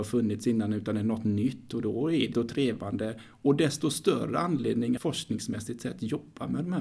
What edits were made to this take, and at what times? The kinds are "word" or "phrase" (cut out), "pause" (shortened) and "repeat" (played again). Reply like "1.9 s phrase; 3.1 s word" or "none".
2.3 s phrase; 5.0 s phrase

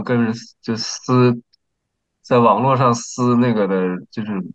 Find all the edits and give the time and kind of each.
none

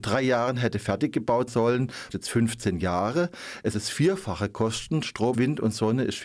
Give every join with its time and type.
1.5 s word; 2.1 s word; 3.7 s word; 5.3 s word

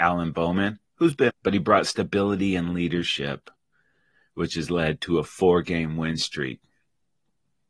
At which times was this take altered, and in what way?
1.3 s word

